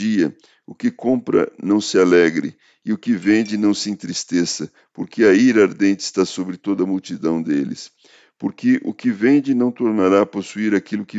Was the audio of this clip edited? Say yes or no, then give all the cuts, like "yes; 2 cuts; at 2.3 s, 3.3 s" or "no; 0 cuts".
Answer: no; 0 cuts